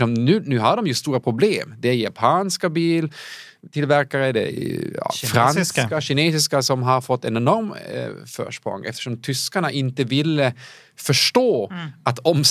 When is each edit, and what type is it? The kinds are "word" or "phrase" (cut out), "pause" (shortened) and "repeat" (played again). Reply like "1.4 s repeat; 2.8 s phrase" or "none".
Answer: none